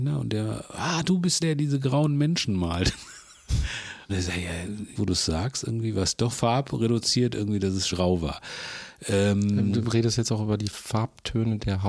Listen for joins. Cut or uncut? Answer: cut